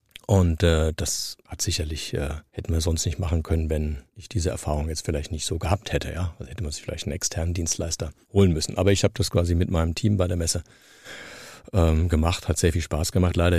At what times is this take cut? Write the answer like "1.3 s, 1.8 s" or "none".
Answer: 1.4 s, 2.5 s, 4.1 s, 8.2 s